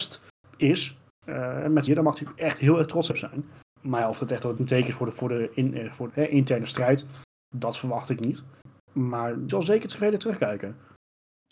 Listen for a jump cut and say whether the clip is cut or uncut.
cut